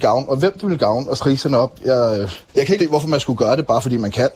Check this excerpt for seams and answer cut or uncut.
cut